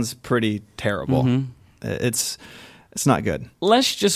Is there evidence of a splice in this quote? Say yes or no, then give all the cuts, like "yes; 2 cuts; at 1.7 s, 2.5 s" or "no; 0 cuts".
no; 0 cuts